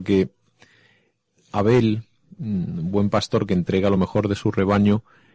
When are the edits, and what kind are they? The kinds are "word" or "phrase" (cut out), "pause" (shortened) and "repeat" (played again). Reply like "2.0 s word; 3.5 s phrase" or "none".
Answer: none

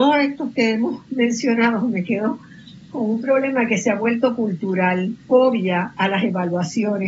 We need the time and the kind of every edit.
5.3 s word

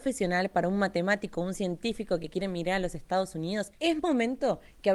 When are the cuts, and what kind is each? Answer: none

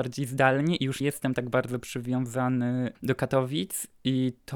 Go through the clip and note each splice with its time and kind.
1.0 s word; 2.9 s word

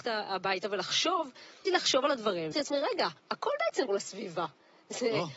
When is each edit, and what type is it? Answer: 1.6 s word; 2.5 s word; 3.2 s pause; 3.9 s word

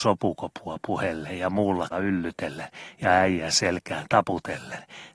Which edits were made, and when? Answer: 1.9 s phrase

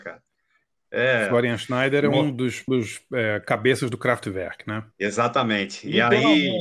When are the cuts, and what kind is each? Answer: 2.7 s word; 4.9 s pause

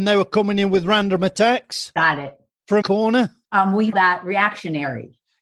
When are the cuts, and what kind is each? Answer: 2.8 s word; 3.4 s pause; 3.9 s word

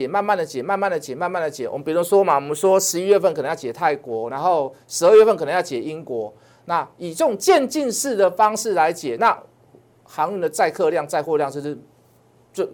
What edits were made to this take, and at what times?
none

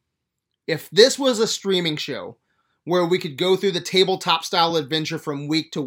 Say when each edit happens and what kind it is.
none

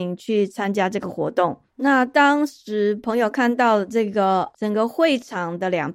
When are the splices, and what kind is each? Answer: 1.7 s pause; 4.5 s word

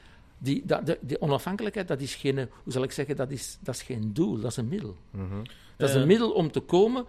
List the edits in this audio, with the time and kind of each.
none

